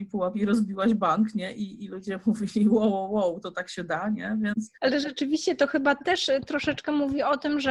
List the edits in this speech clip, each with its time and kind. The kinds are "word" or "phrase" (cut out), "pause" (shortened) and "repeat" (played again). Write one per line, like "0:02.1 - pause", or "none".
0:04.7 - pause